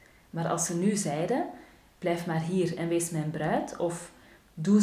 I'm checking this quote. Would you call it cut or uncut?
uncut